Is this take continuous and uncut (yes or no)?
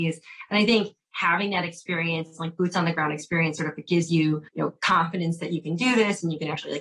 no